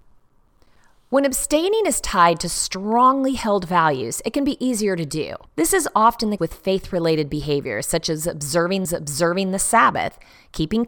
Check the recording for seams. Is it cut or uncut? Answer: cut